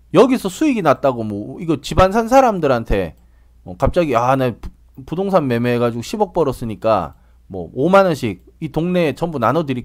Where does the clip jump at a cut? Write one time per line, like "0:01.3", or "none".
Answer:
none